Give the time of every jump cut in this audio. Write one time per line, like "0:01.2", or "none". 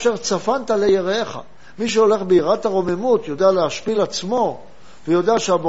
none